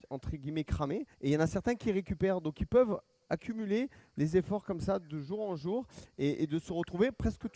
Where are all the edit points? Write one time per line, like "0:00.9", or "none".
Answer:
0:01.1